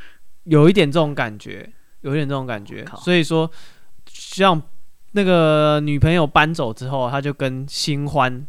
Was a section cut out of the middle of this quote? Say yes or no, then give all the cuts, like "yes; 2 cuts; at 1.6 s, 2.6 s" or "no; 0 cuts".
yes; 1 cut; at 4.0 s